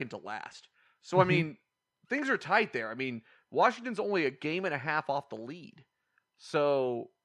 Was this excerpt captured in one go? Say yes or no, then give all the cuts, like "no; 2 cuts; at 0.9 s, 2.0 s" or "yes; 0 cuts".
yes; 0 cuts